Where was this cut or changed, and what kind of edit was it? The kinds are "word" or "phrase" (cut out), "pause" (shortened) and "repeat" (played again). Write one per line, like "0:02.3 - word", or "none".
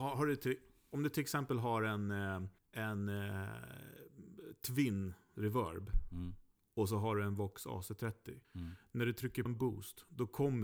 0:02.6 - pause
0:08.4 - pause
0:09.5 - word